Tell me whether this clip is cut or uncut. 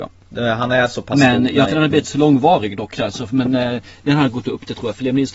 cut